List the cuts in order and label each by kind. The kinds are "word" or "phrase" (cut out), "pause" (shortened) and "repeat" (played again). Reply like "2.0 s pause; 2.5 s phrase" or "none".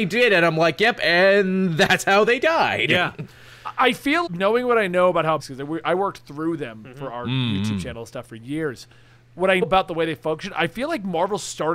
4.3 s word; 5.4 s phrase; 9.6 s word